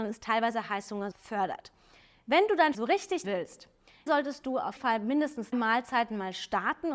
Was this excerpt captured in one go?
no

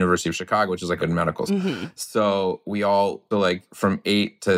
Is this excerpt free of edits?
no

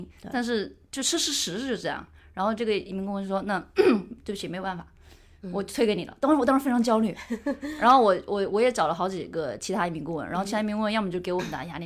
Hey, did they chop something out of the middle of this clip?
no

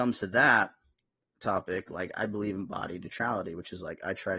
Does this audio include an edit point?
no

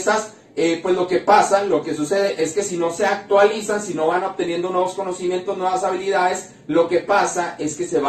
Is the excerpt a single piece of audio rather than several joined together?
yes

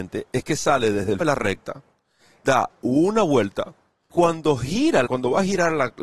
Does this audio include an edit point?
yes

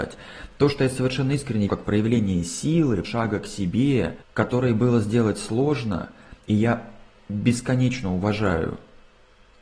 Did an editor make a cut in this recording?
yes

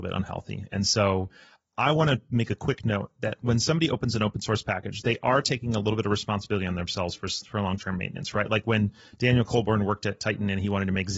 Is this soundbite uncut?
yes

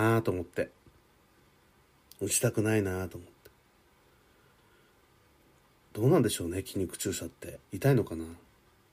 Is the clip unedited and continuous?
no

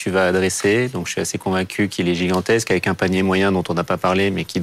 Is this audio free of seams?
yes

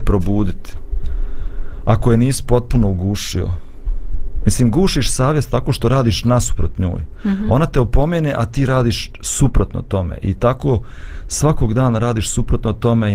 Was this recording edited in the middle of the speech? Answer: no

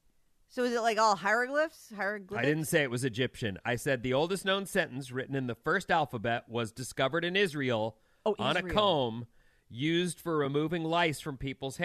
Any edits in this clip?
no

